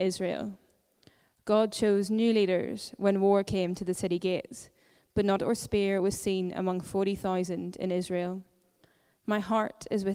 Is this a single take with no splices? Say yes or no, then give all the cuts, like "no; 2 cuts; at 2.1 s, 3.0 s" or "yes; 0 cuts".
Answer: no; 1 cut; at 5.4 s